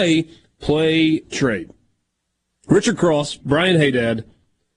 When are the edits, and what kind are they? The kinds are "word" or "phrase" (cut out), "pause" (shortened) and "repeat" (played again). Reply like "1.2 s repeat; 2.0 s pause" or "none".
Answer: 1.3 s word; 3.4 s phrase